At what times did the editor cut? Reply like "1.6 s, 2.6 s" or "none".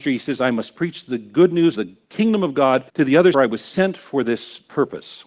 1.7 s, 2.9 s, 3.3 s